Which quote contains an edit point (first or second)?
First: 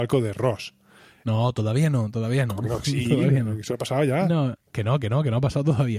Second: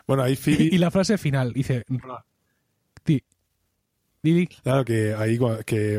first